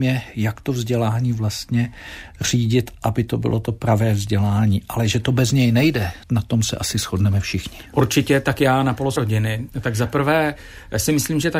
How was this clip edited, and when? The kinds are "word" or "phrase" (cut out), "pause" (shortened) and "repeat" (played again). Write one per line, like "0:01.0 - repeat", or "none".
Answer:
0:06.2 - pause
0:09.2 - word